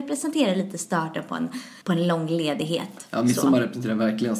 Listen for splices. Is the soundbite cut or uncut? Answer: cut